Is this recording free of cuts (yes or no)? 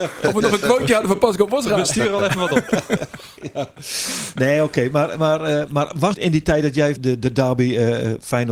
no